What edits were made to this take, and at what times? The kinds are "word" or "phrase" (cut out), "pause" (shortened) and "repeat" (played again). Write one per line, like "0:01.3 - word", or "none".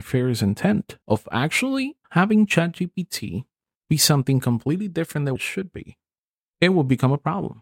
0:01.0 - pause
0:02.0 - pause
0:05.4 - word